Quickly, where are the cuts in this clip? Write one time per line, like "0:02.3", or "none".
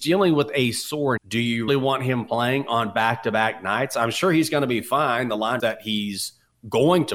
0:01.2
0:01.7
0:05.6